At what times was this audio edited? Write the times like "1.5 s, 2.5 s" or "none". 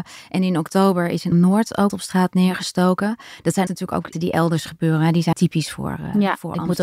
1.3 s, 1.9 s, 3.7 s, 4.1 s, 5.3 s